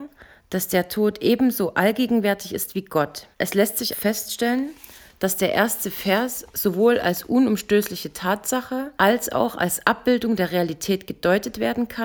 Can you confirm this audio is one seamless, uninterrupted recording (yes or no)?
no